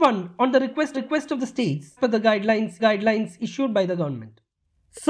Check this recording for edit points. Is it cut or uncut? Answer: cut